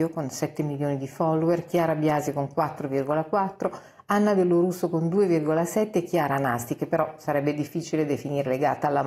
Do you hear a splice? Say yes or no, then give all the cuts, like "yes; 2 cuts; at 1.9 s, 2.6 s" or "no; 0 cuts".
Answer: no; 0 cuts